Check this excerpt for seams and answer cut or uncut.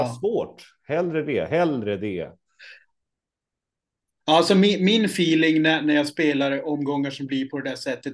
uncut